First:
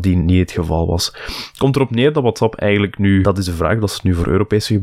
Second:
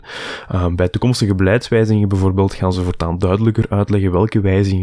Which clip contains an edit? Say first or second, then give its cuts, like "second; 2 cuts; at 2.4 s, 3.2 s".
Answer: first; 1 cut; at 3.2 s